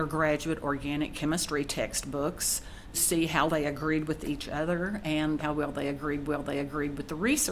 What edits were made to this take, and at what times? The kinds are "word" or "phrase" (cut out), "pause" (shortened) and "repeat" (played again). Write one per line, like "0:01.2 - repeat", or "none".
0:02.9 - word
0:03.5 - word
0:05.4 - word
0:06.3 - repeat